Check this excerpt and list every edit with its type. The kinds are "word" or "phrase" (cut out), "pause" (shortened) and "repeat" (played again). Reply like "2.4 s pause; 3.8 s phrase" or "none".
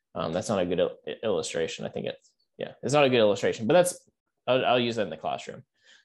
none